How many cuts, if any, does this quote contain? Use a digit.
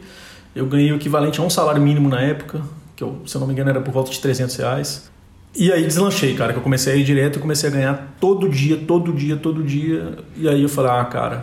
0